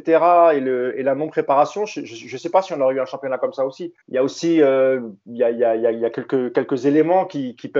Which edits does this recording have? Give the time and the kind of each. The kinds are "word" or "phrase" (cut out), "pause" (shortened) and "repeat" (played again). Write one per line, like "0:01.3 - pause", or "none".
0:04.0 - pause